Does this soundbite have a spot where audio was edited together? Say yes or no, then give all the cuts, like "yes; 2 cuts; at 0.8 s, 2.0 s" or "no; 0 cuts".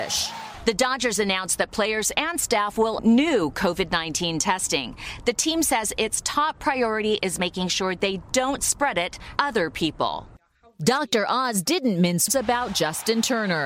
yes; 3 cuts; at 3.0 s, 9.4 s, 12.3 s